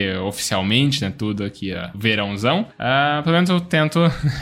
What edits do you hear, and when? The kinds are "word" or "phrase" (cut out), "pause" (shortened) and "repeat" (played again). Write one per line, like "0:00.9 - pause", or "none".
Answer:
none